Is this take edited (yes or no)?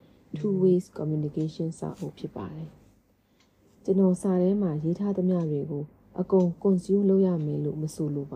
no